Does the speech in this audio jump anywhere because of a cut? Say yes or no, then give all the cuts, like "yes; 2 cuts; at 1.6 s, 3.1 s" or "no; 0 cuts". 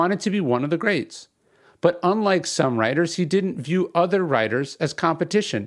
no; 0 cuts